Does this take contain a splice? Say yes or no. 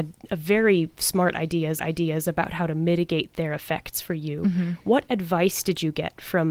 yes